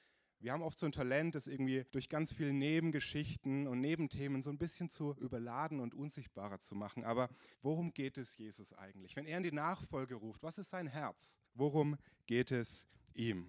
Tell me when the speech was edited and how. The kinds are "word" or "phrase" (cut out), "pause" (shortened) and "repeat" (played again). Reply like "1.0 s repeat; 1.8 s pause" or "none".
1.9 s pause; 7.5 s pause; 11.5 s pause